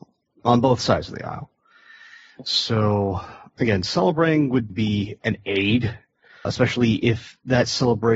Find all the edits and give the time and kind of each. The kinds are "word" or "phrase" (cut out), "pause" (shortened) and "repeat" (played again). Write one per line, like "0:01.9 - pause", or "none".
0:03.5 - word
0:04.7 - word
0:06.4 - word